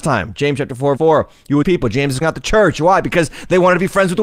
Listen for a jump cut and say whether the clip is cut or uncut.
cut